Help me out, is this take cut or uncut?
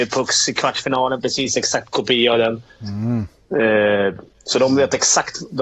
uncut